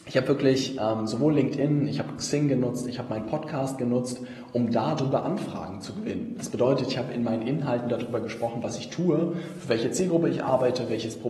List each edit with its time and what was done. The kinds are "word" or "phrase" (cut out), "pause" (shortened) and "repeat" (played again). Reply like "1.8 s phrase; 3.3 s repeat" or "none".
none